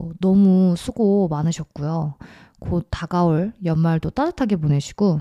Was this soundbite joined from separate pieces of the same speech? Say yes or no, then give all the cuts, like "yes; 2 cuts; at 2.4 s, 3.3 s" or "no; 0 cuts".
no; 0 cuts